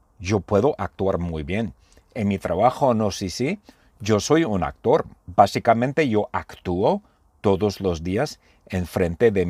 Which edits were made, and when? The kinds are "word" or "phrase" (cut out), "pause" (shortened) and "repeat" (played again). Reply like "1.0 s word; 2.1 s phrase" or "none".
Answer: none